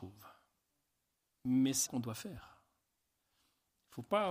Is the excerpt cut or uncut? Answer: cut